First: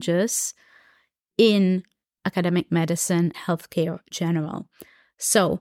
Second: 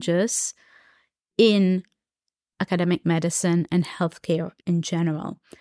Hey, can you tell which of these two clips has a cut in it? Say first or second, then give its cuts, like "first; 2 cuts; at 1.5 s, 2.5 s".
first; 3 cuts; at 2.0 s, 3.3 s, 4.1 s